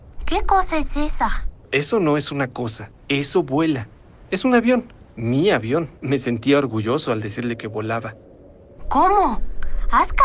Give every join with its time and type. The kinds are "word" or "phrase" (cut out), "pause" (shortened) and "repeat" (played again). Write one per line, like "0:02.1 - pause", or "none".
0:03.0 - pause
0:04.3 - pause
0:05.1 - pause
0:06.0 - pause